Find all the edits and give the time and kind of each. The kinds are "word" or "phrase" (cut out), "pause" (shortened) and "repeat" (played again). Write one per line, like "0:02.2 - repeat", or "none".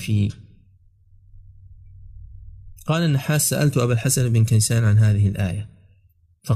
0:02.8 - pause